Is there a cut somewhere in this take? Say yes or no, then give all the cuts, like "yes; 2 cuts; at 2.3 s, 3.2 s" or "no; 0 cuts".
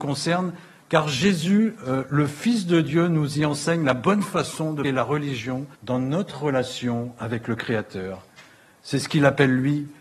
yes; 2 cuts; at 4.8 s, 5.7 s